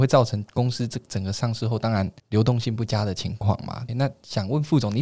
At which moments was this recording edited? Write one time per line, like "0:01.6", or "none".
0:02.2
0:03.9